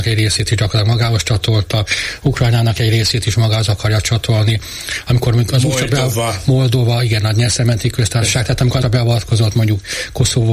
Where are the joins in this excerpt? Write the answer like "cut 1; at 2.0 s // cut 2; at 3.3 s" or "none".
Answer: cut 1; at 8.8 s